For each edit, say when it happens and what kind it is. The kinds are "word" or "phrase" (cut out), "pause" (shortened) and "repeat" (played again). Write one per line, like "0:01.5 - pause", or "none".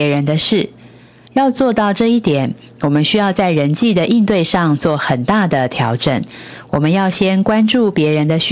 none